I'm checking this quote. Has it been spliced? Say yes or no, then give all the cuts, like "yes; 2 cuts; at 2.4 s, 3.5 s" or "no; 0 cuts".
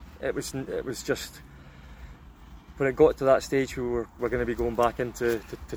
yes; 1 cut; at 4.2 s